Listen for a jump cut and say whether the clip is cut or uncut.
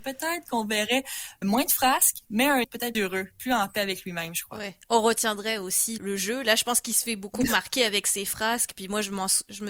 cut